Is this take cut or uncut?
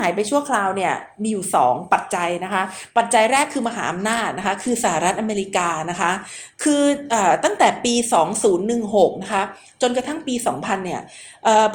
uncut